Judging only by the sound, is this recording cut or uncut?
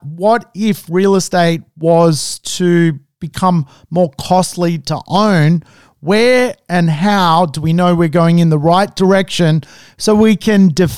uncut